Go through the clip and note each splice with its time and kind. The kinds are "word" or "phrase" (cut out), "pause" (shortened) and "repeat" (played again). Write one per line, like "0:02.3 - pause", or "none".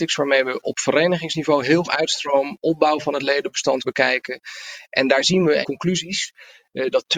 0:01.8 - phrase
0:03.8 - word
0:05.6 - phrase